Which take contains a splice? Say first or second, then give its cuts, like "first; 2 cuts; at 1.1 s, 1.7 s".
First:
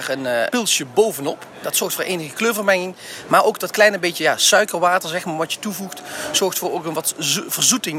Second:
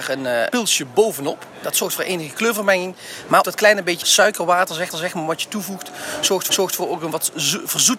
second; 4 cuts; at 3.4 s, 4.0 s, 4.9 s, 6.5 s